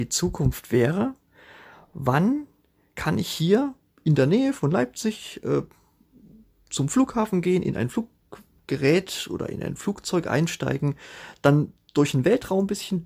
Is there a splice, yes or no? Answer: no